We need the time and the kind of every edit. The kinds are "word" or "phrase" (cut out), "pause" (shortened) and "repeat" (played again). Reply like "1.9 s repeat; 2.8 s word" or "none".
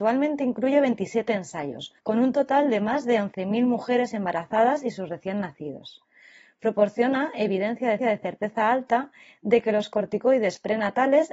2.0 s pause; 8.0 s repeat